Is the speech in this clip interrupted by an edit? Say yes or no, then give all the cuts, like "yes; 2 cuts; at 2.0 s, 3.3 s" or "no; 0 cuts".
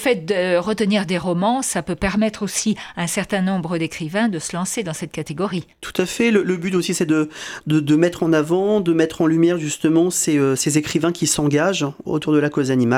yes; 1 cut; at 5.7 s